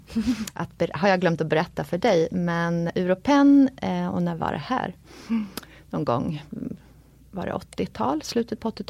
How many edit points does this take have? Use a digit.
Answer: 1